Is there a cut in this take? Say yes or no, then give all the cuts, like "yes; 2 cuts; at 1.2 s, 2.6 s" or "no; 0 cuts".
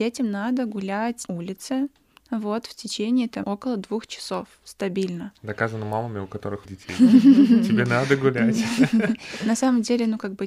yes; 3 cuts; at 1.3 s, 3.4 s, 6.7 s